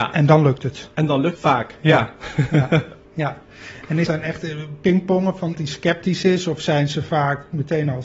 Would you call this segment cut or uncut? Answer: cut